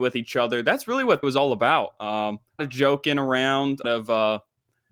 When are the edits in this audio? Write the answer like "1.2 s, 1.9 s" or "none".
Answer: 1.2 s, 2.6 s, 3.8 s

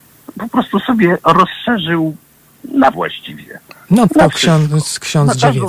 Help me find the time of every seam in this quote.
2.9 s, 4.1 s

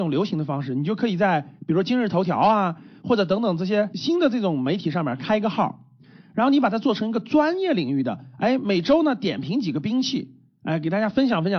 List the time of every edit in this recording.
none

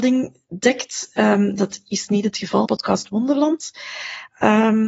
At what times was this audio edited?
2.7 s

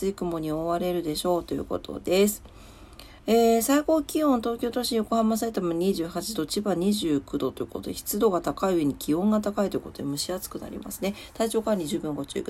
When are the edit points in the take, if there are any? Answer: 3.2 s

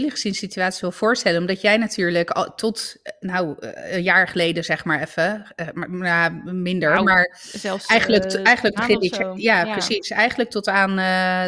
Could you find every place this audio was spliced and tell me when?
8.8 s

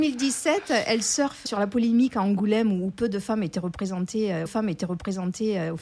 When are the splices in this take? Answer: 1.5 s, 4.5 s

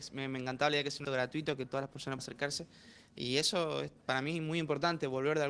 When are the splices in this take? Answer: 1.0 s, 2.2 s

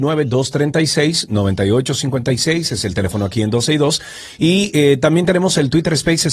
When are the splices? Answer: none

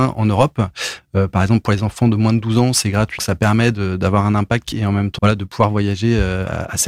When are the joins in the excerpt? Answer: 3.2 s, 4.7 s, 5.2 s

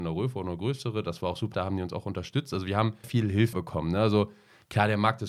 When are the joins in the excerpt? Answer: 1.5 s, 3.0 s, 3.5 s

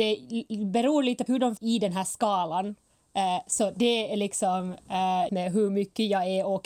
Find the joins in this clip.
1.3 s, 1.6 s, 5.3 s

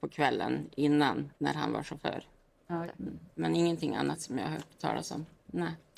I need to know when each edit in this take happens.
1.4 s, 2.8 s

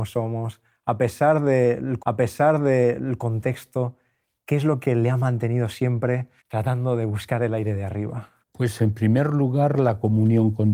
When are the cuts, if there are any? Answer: 2.0 s, 6.4 s, 8.4 s

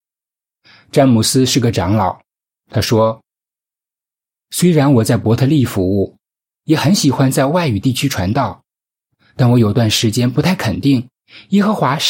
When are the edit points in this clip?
none

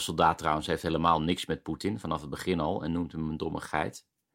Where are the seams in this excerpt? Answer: none

